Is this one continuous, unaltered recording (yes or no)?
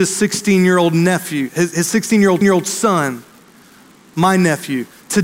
no